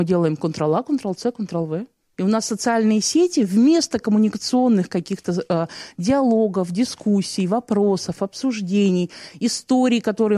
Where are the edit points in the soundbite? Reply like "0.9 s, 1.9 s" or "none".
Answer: none